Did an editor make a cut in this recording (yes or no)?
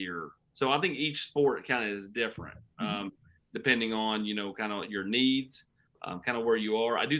no